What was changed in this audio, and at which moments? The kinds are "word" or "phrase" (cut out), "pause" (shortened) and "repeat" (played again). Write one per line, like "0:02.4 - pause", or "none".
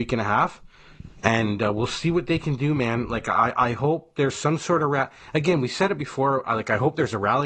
none